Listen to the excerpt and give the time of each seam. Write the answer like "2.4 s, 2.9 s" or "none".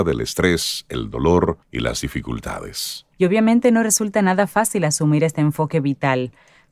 1.6 s, 3.1 s